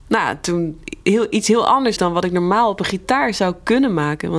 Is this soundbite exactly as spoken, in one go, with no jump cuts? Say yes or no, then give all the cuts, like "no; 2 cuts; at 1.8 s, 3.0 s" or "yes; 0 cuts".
no; 1 cut; at 2.0 s